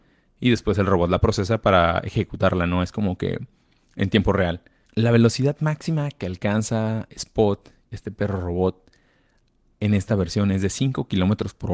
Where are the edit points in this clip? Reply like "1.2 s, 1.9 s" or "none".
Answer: none